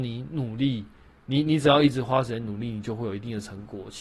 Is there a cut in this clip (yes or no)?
no